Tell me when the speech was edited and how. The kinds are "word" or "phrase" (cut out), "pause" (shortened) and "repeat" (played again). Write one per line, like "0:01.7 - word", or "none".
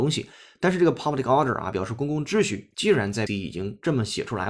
0:03.3 - word

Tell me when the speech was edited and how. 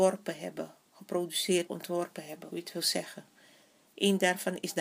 0:01.7 - word
0:02.5 - word

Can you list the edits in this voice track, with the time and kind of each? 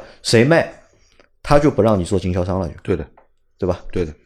none

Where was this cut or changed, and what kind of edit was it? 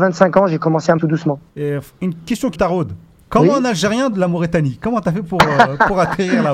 0:01.0 - phrase
0:01.5 - pause
0:02.5 - word
0:03.2 - pause
0:04.1 - phrase

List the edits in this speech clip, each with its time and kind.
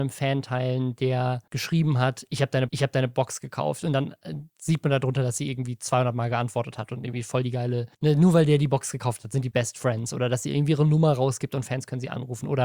0:01.5 - pause
0:02.7 - repeat
0:07.9 - pause
0:09.5 - word

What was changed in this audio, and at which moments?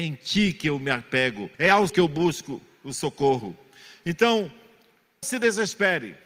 0:01.5 - pause
0:01.9 - word
0:05.2 - word

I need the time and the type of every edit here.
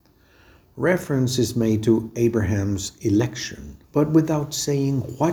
0:03.8 - pause

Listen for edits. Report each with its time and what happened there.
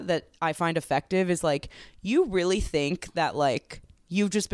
none

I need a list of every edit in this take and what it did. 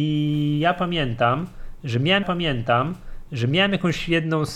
0:02.2 - repeat

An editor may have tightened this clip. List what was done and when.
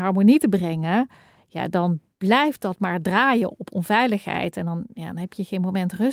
none

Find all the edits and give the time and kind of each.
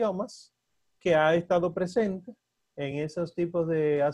none

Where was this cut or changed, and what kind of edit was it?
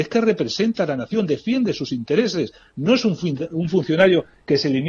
none

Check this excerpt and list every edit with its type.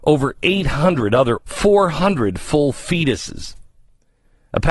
0:01.4 - word

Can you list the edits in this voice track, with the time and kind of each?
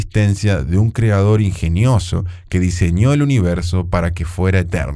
none

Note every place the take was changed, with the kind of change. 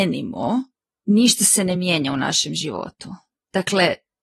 none

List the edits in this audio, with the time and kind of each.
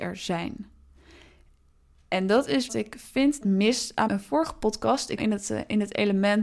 0:02.7 - phrase
0:03.4 - word
0:04.1 - word
0:05.2 - phrase

